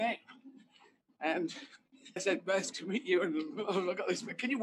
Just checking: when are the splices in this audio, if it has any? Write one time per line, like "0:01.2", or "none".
0:02.2
0:02.7

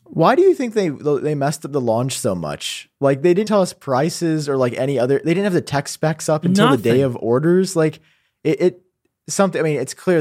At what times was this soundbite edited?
0:03.5

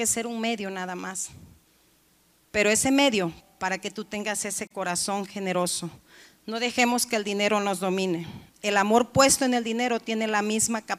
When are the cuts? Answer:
none

